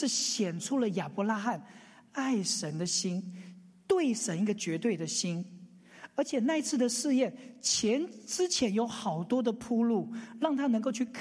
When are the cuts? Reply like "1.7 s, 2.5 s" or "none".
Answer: none